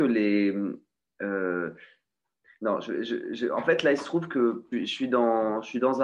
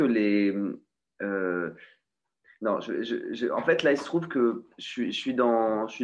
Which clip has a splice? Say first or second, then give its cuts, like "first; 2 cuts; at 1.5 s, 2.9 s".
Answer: first; 1 cut; at 4.7 s